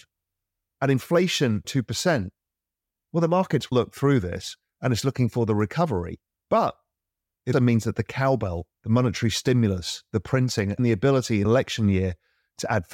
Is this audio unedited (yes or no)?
no